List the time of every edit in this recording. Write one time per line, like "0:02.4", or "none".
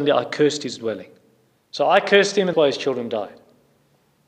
0:02.5